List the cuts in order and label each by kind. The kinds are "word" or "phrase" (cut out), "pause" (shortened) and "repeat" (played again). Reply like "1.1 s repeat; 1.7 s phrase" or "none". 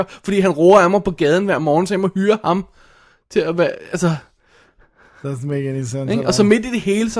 none